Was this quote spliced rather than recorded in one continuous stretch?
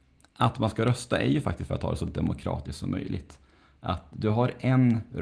no; 0 cuts

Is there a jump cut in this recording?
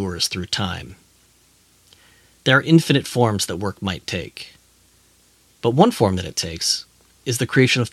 no; 0 cuts

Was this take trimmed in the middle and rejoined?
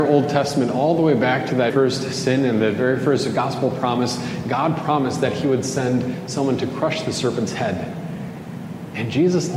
yes; 1 cut; at 1.7 s

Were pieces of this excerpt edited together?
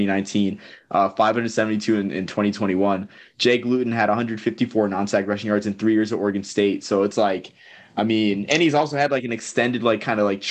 no; 0 cuts

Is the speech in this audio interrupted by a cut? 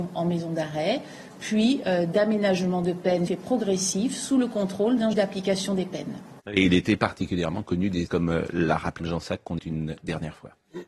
yes; 6 cuts; at 3.3 s, 5.1 s, 6.4 s, 8.1 s, 9.0 s, 9.6 s

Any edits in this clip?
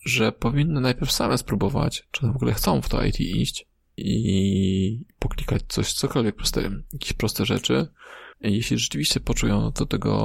yes; 2 cuts; at 4.0 s, 8.3 s

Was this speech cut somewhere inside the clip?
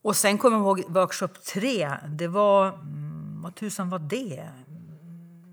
no; 0 cuts

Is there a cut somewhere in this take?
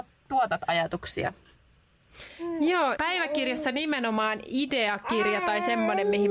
yes; 1 cut; at 3.0 s

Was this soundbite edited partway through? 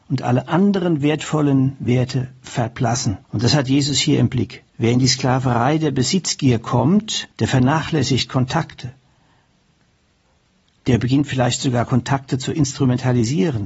yes; 3 cuts; at 3.2 s, 4.7 s, 7.3 s

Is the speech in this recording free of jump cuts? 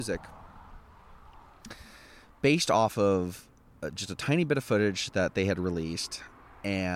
yes; 0 cuts

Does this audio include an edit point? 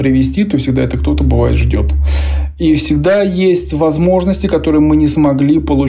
no; 0 cuts

